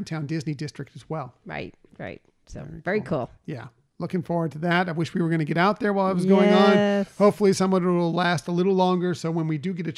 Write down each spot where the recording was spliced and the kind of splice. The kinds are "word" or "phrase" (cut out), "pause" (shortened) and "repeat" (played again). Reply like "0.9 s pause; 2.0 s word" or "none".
none